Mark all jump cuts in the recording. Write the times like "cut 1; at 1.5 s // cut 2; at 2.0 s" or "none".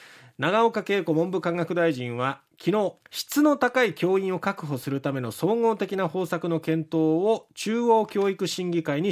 cut 1; at 2.5 s // cut 2; at 3.0 s